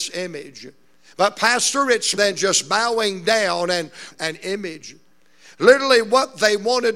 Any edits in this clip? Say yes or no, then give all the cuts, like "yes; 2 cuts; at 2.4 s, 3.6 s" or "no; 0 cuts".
yes; 2 cuts; at 2.2 s, 4.1 s